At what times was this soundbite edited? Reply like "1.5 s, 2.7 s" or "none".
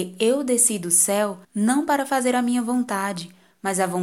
1.4 s